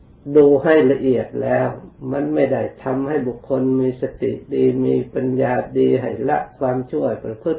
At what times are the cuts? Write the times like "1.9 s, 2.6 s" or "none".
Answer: none

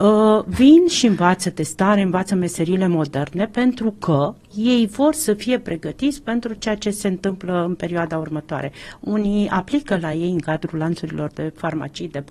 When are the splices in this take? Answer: none

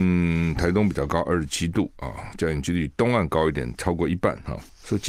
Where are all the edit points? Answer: none

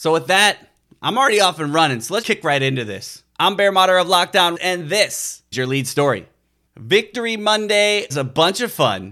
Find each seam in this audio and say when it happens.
2.2 s, 3.3 s, 4.5 s, 5.5 s, 8.1 s

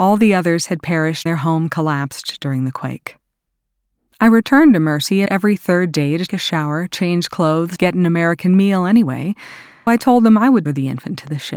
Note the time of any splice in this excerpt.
1.3 s, 5.3 s, 6.3 s, 7.8 s, 9.9 s, 10.6 s

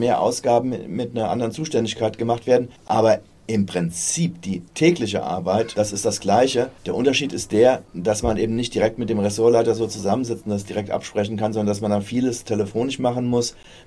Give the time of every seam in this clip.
2.8 s, 4.7 s, 6.8 s

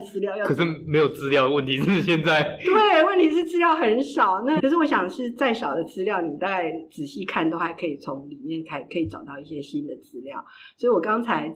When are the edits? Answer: 4.6 s

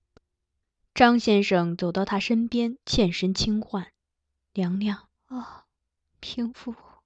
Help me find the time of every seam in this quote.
2.8 s, 4.0 s, 5.1 s

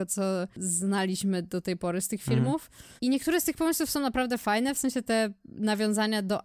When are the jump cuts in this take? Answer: 3.0 s

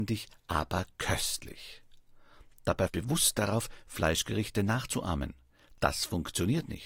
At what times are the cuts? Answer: 2.9 s

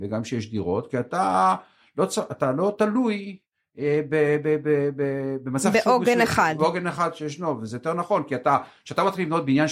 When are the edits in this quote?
none

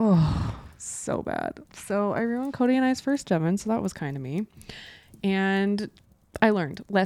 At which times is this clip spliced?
1.6 s, 3.2 s

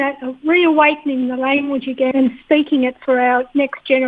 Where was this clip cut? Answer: 2.1 s

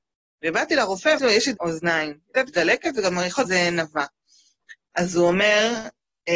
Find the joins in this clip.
1.2 s, 1.6 s, 2.5 s, 3.4 s

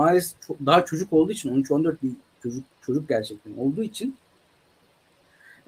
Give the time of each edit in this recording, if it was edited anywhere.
2.0 s, 2.7 s

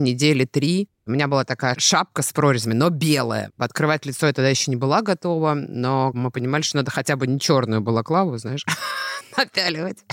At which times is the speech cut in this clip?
1.0 s

